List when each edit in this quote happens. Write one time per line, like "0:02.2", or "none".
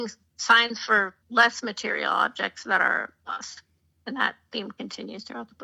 0:01.2
0:03.2